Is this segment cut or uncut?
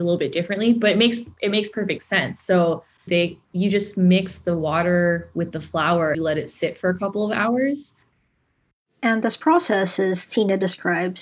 cut